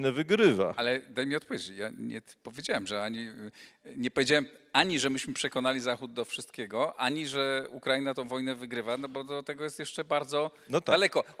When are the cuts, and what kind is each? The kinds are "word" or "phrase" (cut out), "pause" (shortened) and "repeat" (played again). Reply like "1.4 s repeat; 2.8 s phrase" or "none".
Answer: none